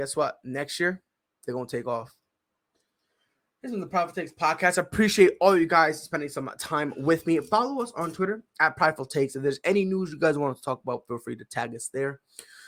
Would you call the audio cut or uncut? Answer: uncut